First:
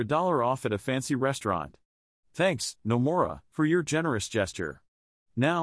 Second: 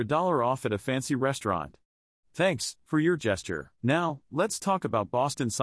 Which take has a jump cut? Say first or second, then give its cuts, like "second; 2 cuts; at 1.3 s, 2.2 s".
second; 3 cuts; at 2.8 s, 3.2 s, 3.8 s